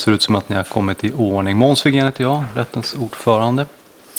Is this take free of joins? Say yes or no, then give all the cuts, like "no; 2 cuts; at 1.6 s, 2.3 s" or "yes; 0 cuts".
yes; 0 cuts